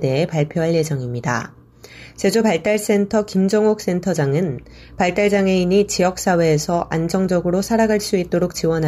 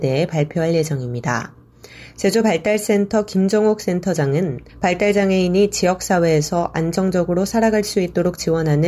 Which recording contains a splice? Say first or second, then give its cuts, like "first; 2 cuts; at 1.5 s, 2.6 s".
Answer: second; 1 cut; at 4.7 s